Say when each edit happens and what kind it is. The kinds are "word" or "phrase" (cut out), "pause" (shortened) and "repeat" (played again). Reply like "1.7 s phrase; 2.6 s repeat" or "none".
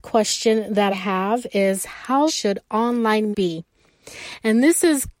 0.9 s word; 2.3 s word; 3.3 s word